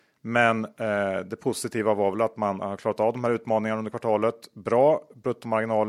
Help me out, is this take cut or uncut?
uncut